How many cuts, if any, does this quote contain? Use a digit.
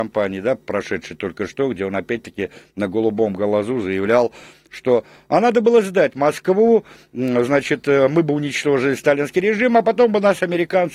0